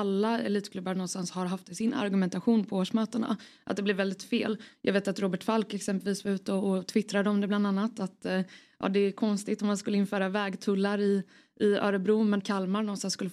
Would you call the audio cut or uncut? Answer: cut